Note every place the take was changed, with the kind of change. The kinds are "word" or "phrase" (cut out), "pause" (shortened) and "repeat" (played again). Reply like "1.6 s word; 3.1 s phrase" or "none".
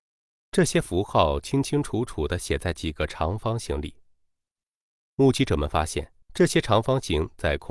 6.2 s pause